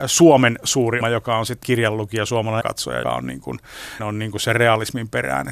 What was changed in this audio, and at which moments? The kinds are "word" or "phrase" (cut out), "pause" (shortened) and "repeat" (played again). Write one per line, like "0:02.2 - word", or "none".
0:01.0 - word
0:01.6 - word
0:02.6 - word
0:03.0 - word
0:04.0 - word